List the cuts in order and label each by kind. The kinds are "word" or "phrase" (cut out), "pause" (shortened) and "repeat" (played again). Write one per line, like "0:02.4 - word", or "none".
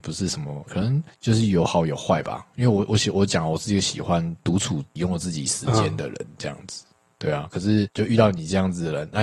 none